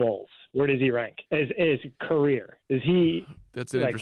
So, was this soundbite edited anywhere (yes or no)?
yes